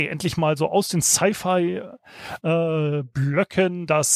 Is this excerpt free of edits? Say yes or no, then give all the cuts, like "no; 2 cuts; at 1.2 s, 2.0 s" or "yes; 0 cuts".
yes; 0 cuts